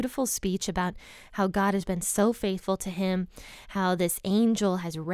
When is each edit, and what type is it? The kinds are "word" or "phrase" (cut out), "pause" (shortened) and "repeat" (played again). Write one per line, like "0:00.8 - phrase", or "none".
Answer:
none